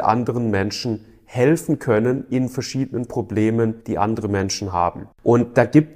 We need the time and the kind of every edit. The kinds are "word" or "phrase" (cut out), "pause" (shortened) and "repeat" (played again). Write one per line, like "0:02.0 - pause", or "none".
0:03.8 - pause